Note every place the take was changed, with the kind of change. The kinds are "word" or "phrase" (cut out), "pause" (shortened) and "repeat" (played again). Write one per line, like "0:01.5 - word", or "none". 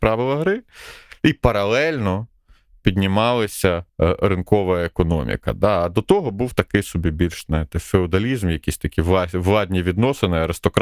0:03.9 - pause